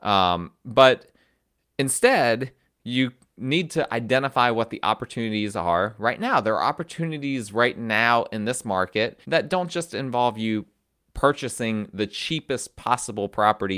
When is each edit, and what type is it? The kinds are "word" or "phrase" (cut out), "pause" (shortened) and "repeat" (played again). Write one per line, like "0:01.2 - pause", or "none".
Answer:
0:09.2 - pause